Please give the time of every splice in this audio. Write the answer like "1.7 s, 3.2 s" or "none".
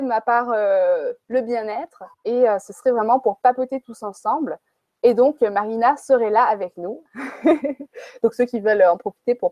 2.1 s

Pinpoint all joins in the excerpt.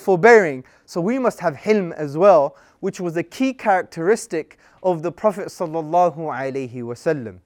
none

